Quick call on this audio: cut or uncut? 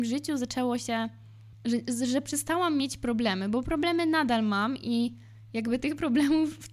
uncut